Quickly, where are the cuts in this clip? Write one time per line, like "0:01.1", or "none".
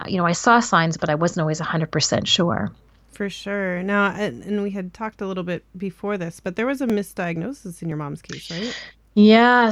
none